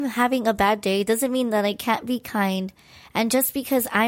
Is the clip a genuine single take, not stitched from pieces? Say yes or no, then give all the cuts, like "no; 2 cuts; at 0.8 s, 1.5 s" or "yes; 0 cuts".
yes; 0 cuts